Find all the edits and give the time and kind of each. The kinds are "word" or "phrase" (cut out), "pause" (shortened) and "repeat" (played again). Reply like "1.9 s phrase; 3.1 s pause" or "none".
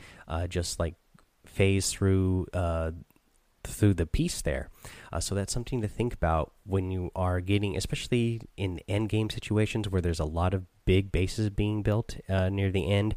none